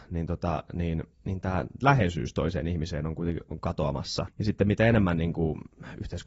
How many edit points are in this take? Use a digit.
1